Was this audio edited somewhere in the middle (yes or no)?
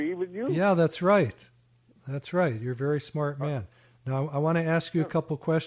no